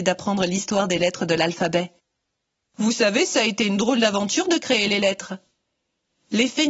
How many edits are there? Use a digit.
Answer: 0